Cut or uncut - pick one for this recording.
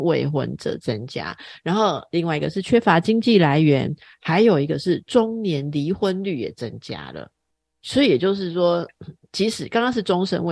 uncut